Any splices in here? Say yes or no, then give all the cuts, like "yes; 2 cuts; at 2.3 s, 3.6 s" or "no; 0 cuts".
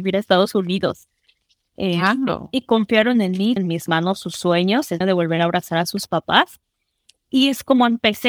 yes; 2 cuts; at 3.6 s, 5.0 s